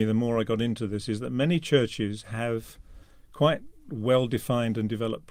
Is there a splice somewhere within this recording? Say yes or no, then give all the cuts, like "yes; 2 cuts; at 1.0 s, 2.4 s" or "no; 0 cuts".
no; 0 cuts